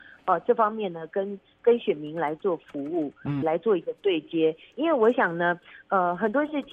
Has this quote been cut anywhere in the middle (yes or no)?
yes